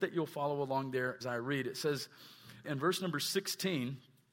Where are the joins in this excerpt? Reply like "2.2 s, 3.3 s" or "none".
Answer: 1.2 s, 2.6 s